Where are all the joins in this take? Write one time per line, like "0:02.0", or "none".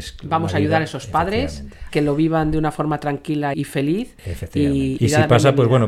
0:01.9
0:03.5
0:05.0